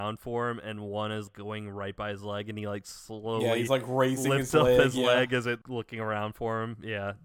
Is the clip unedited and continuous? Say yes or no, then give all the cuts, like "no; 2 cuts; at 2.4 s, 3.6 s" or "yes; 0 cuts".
yes; 0 cuts